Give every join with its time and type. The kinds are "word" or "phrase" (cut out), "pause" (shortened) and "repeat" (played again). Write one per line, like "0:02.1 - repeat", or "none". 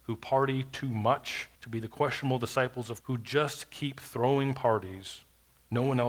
0:01.5 - pause
0:03.0 - word